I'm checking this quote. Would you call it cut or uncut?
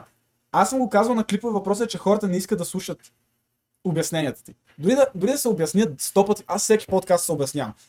uncut